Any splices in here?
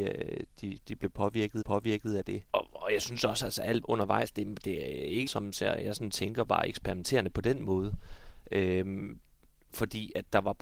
yes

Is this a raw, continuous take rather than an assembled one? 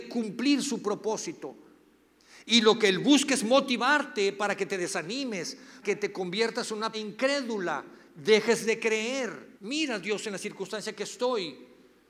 no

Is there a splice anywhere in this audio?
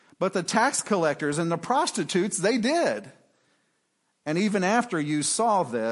no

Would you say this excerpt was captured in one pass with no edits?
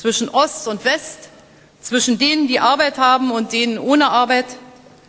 yes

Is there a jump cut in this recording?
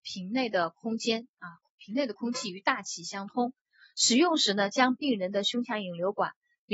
no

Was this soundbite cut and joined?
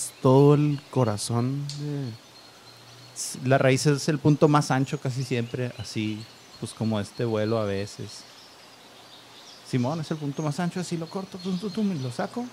no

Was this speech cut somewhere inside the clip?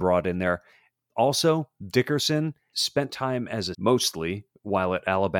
yes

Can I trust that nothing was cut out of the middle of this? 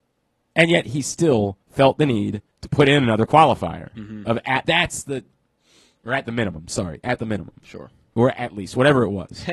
no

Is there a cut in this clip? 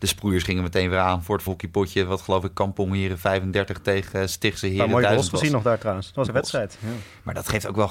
yes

